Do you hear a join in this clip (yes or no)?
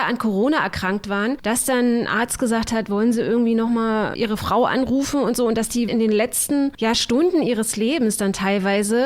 yes